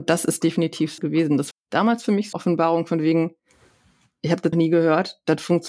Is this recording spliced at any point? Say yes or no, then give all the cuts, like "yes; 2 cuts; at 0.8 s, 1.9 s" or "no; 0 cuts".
yes; 4 cuts; at 1.0 s, 1.5 s, 2.3 s, 4.5 s